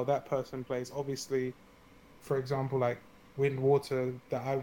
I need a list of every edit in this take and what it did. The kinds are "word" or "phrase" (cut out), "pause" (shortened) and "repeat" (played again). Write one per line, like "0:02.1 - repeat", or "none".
none